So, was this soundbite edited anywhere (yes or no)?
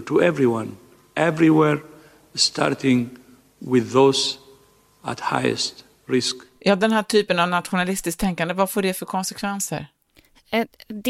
no